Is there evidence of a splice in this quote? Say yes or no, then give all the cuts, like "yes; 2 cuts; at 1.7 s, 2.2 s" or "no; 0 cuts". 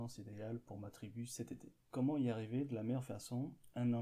no; 0 cuts